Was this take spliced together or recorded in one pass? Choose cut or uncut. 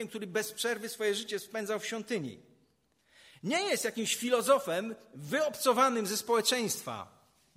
uncut